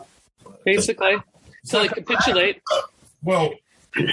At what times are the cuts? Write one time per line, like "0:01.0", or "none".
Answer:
none